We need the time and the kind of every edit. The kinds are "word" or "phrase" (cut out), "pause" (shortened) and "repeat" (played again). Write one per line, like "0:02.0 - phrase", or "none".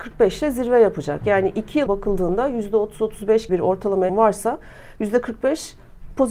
0:01.9 - word
0:03.5 - word
0:04.1 - word